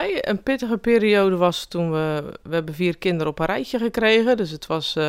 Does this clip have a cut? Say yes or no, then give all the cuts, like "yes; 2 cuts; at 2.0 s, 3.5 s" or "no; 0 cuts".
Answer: no; 0 cuts